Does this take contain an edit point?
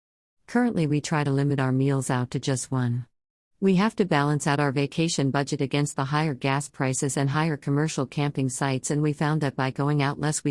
no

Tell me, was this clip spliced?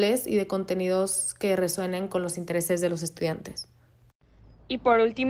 no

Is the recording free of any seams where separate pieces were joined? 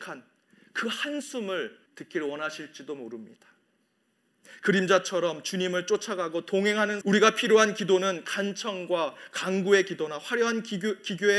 no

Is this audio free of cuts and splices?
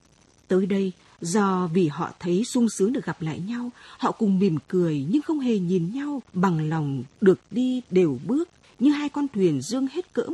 no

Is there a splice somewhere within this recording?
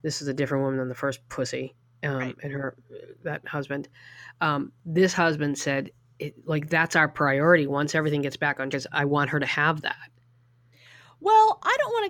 yes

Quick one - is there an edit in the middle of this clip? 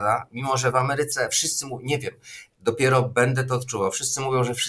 no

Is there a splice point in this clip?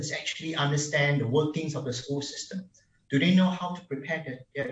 no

